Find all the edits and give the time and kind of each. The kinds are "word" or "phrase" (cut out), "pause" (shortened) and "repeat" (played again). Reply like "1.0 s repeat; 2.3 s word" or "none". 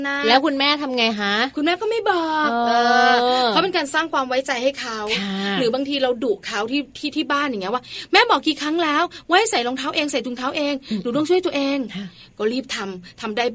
none